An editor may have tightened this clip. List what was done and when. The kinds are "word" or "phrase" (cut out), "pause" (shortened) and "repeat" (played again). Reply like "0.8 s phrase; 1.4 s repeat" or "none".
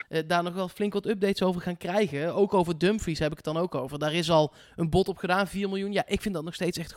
none